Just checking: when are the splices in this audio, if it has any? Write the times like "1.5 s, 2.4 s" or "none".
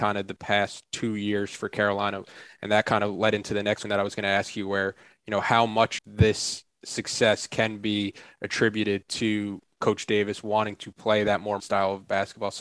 3.8 s, 6.0 s, 11.6 s